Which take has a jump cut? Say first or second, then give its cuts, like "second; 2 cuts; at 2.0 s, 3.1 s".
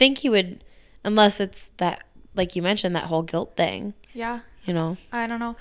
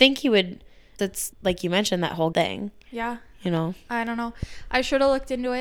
second; 3 cuts; at 1.0 s, 1.3 s, 2.3 s